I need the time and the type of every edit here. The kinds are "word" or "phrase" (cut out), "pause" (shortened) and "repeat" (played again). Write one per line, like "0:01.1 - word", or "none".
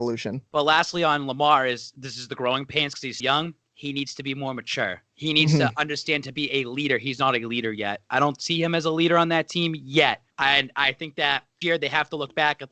0:03.2 - word
0:10.3 - pause
0:11.6 - word